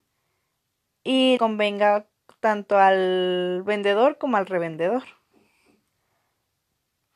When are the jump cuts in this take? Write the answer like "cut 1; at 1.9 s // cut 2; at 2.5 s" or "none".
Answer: cut 1; at 1.4 s